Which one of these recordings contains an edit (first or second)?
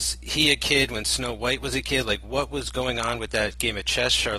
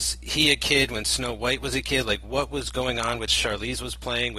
second